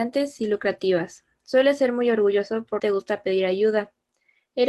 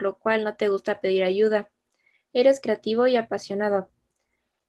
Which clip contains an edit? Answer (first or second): first